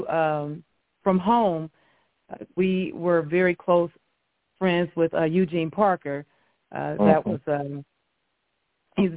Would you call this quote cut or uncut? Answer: uncut